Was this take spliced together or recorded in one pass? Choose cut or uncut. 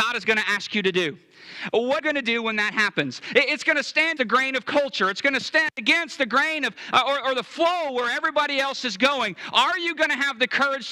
cut